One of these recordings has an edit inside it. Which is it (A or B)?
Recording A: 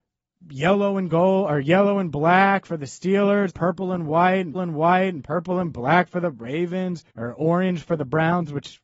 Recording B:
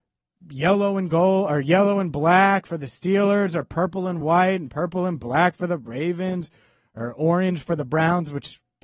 A